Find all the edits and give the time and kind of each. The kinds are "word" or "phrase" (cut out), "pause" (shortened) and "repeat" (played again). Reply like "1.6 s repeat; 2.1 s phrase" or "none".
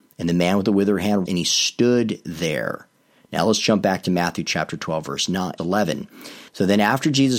1.3 s word; 5.6 s word; 6.5 s pause